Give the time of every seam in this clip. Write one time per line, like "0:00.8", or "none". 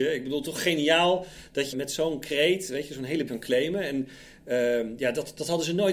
0:01.7
0:03.3